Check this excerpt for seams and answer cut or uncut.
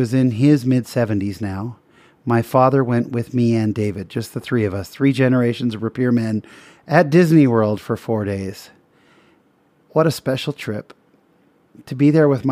uncut